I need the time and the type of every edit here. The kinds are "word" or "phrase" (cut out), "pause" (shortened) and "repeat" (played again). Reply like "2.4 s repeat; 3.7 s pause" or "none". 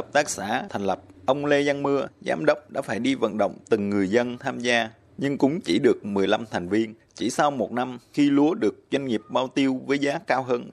7.0 s pause